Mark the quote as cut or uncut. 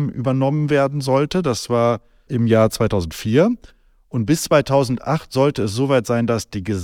cut